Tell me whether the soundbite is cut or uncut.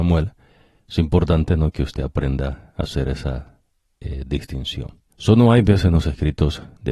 cut